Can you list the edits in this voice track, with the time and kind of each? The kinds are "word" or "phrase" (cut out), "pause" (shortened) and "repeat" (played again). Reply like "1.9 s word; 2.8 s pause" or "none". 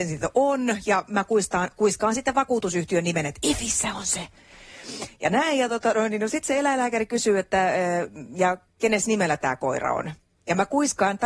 none